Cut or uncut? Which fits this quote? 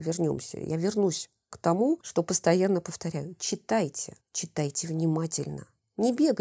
cut